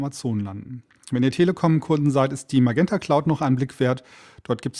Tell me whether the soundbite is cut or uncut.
uncut